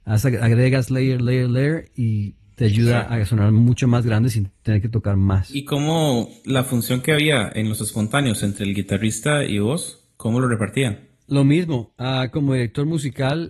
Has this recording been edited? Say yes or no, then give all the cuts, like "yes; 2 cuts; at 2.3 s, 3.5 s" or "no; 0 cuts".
no; 0 cuts